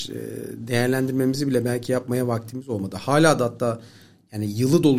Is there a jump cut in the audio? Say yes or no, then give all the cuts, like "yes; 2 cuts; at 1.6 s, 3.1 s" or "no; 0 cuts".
no; 0 cuts